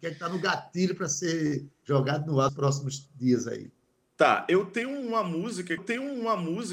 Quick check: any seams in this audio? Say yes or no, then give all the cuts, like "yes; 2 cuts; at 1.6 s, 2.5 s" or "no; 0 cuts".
yes; 3 cuts; at 1.7 s, 2.5 s, 5.8 s